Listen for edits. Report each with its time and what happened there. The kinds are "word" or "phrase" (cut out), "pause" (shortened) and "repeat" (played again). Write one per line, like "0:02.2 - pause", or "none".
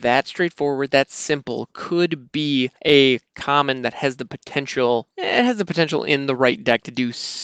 0:02.8 - pause
0:05.1 - pause